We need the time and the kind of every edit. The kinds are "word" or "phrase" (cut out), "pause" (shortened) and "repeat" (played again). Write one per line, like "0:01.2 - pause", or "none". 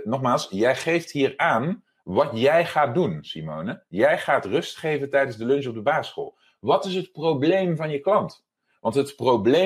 none